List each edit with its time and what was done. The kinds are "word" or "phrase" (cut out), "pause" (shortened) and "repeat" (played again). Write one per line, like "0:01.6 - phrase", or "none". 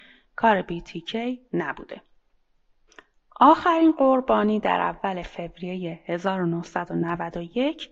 none